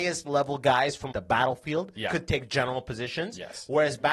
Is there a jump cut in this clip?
yes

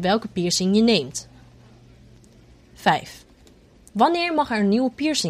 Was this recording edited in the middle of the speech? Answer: no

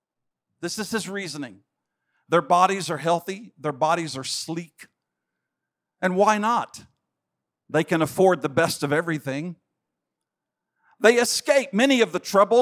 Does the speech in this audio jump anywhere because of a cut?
no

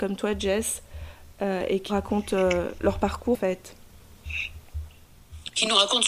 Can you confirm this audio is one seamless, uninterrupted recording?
no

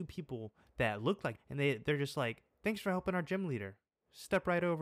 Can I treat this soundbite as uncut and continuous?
no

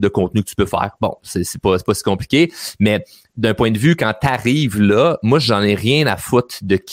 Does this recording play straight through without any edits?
yes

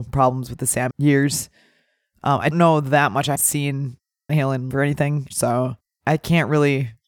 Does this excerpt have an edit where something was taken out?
yes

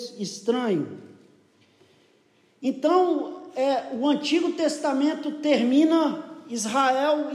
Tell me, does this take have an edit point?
no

